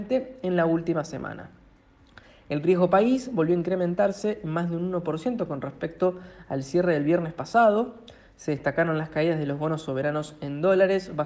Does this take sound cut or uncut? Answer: uncut